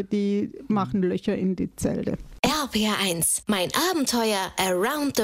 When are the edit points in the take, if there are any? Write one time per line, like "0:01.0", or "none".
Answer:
none